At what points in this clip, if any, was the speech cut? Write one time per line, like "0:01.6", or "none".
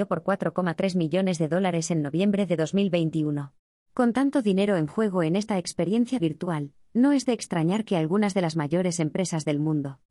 0:03.7
0:06.2